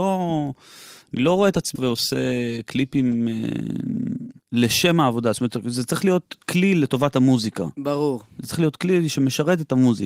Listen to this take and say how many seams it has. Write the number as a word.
three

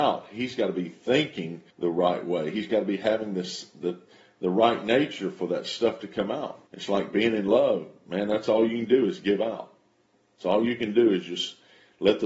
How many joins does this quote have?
two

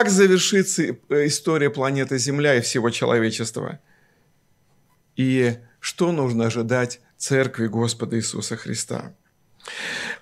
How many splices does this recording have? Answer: zero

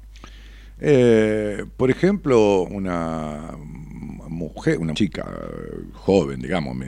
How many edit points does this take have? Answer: two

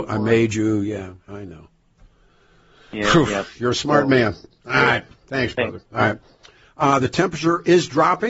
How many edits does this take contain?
zero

